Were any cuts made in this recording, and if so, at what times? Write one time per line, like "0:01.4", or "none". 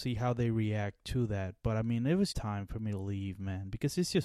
0:02.3